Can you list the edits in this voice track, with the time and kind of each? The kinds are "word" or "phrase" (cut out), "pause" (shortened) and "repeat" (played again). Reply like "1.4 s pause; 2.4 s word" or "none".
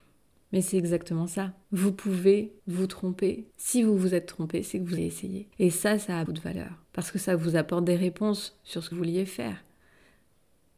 1.6 s pause; 2.6 s pause; 3.5 s pause; 5.0 s word; 5.5 s pause; 6.3 s word; 6.8 s pause; 8.9 s word